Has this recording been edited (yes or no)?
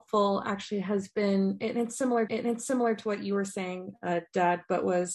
yes